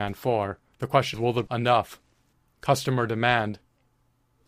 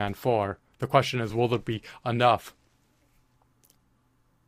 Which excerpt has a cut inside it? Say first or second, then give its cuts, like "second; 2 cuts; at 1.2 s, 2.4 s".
first; 3 cuts; at 1.1 s, 1.5 s, 2.3 s